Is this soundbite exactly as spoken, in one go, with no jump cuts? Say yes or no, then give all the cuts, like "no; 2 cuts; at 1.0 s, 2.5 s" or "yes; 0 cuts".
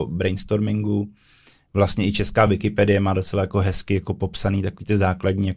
yes; 0 cuts